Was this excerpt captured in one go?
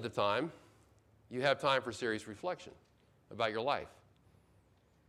yes; 0 cuts

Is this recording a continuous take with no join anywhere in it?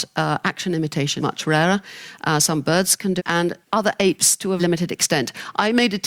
no; 4 cuts; at 1.2 s, 3.2 s, 3.6 s, 4.6 s

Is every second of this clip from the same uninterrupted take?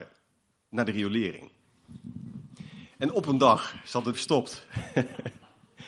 no; 1 cut; at 4.1 s

